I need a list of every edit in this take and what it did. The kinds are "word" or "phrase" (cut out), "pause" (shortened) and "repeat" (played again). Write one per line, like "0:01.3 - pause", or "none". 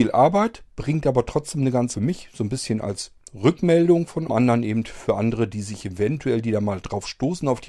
0:01.9 - phrase
0:04.3 - phrase